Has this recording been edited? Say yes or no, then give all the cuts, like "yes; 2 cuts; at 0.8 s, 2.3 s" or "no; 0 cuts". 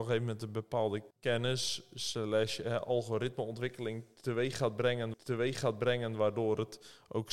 yes; 2 cuts; at 1.1 s, 5.1 s